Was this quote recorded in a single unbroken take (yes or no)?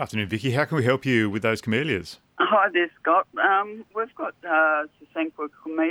no